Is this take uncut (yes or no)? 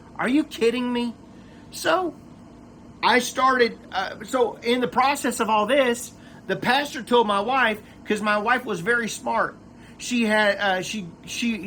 yes